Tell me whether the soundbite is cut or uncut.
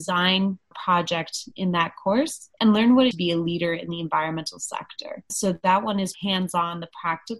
cut